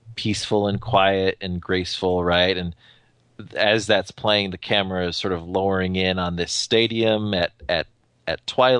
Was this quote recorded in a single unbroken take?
yes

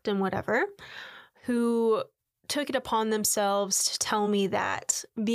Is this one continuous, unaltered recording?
yes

